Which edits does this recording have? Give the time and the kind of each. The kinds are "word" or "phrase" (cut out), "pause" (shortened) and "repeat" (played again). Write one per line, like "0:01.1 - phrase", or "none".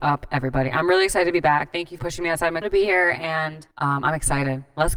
0:02.0 - phrase
0:02.6 - phrase
0:03.7 - pause